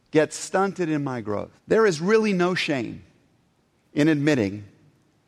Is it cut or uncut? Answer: cut